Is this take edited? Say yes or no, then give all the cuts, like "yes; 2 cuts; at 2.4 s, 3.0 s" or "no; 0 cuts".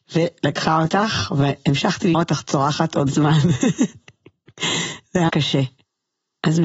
yes; 3 cuts; at 2.1 s, 3.1 s, 5.3 s